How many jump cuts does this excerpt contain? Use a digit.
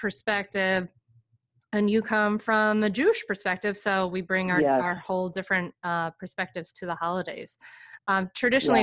0